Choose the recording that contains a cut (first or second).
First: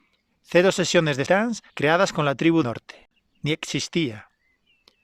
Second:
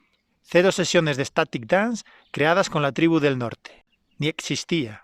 first